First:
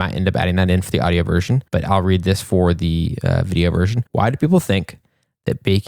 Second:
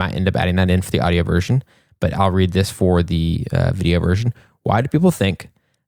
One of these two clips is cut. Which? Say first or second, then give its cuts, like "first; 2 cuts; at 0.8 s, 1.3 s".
first; 2 cuts; at 1.7 s, 4.1 s